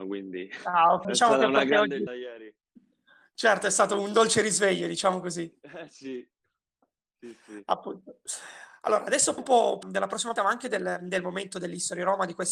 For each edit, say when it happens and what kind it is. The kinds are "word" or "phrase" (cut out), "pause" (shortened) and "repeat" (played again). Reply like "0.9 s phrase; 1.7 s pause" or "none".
1.0 s word; 2.1 s word; 9.4 s word; 9.8 s word; 10.4 s word